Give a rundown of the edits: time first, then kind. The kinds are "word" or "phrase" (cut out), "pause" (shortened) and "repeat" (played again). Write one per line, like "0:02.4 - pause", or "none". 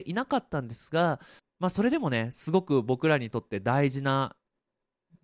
0:01.4 - pause